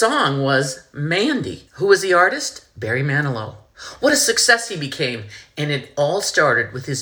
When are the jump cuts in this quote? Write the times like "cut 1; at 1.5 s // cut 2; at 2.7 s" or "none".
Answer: cut 1; at 1.7 s